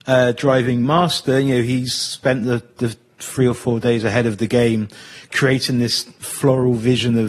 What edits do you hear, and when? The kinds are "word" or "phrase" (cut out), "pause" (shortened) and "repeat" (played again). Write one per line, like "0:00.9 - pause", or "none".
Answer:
none